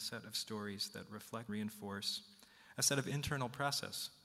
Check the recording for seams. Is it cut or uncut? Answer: cut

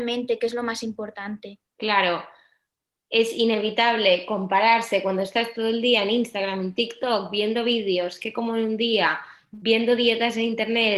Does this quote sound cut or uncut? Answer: cut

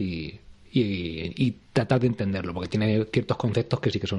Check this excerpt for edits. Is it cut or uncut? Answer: uncut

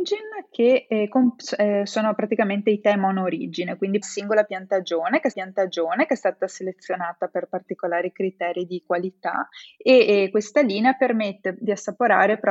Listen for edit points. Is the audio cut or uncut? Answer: cut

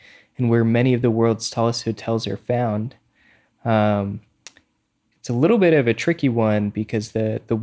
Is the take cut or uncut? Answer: uncut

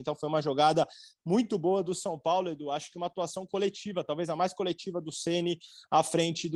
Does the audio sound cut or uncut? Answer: uncut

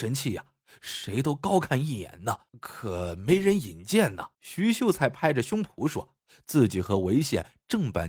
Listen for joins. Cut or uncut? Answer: cut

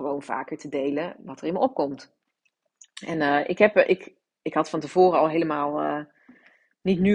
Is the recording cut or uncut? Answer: uncut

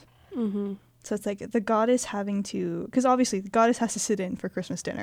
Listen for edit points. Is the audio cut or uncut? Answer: uncut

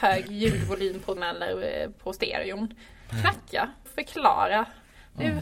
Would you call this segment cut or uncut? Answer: cut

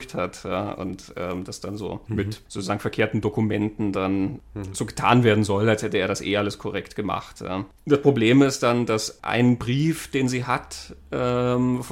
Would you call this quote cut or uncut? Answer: uncut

